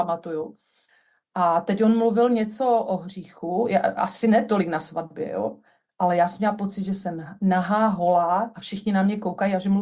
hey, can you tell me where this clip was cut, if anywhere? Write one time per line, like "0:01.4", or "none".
none